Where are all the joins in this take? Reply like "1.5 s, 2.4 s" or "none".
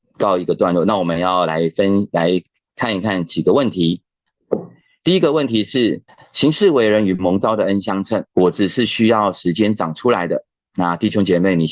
6.1 s, 8.3 s